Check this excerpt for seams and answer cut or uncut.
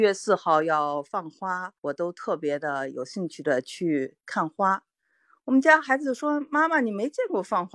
cut